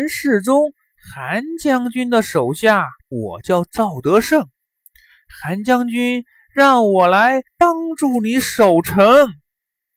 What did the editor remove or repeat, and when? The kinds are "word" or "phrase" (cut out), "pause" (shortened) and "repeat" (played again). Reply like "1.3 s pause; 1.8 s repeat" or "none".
3.0 s pause; 7.5 s pause